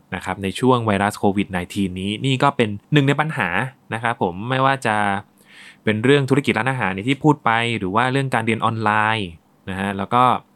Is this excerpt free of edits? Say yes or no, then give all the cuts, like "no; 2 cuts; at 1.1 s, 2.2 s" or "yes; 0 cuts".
no; 1 cut; at 2.8 s